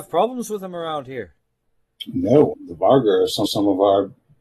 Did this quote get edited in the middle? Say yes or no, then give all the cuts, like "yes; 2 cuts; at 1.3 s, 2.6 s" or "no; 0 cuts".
yes; 2 cuts; at 2.5 s, 3.5 s